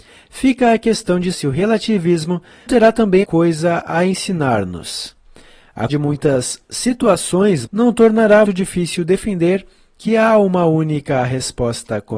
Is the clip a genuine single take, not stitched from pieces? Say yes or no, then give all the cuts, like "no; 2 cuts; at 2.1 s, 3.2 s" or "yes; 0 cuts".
no; 6 cuts; at 1.3 s, 2.7 s, 3.2 s, 5.9 s, 7.7 s, 8.4 s